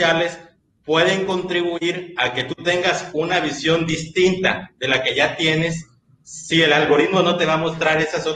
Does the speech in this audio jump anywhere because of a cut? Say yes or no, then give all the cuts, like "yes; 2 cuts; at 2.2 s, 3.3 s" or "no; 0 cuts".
no; 0 cuts